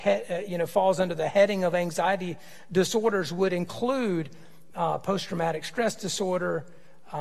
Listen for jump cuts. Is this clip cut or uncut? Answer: uncut